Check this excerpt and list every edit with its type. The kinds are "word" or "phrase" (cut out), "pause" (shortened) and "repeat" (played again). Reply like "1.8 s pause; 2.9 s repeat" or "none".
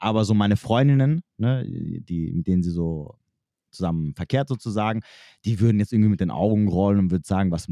none